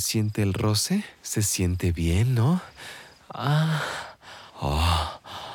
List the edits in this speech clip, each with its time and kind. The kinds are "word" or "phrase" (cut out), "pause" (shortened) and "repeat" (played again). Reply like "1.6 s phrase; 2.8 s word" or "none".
1.2 s pause; 4.5 s pause